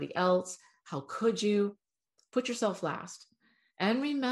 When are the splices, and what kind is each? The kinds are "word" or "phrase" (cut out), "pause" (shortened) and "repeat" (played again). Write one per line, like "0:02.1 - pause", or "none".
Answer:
none